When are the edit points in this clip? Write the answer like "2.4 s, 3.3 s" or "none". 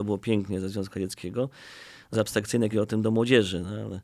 2.1 s, 2.7 s